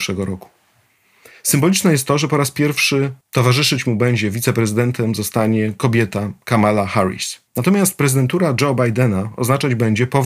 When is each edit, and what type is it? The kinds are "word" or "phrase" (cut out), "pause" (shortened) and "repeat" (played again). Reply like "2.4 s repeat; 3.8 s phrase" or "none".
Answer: 3.2 s pause; 7.5 s pause